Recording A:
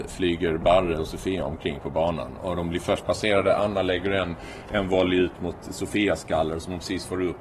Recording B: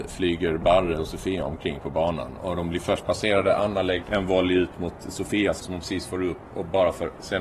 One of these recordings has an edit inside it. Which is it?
B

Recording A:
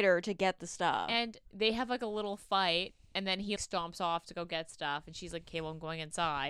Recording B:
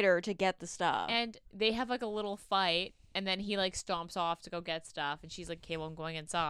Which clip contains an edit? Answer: A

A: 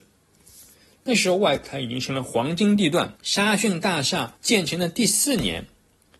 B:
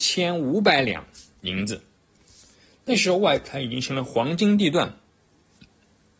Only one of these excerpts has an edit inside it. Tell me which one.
A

